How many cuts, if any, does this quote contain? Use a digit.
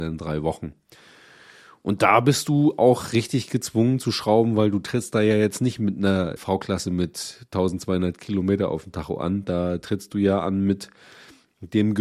1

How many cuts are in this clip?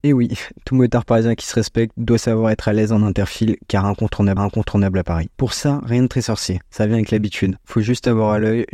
1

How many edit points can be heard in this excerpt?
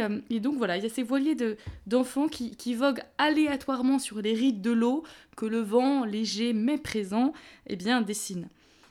0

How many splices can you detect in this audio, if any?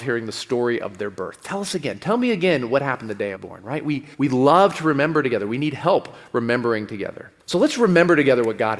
3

